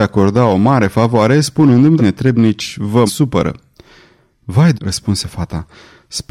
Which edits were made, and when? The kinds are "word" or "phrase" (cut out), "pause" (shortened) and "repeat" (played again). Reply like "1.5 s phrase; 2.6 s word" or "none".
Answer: 2.0 s phrase; 3.1 s word; 4.7 s word